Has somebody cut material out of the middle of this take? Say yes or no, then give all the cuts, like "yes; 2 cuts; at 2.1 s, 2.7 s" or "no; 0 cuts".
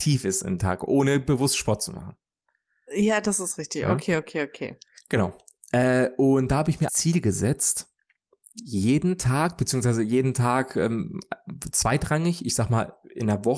yes; 1 cut; at 6.9 s